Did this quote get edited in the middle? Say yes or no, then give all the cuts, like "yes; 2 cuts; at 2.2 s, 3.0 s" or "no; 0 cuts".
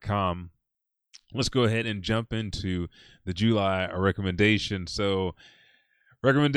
no; 0 cuts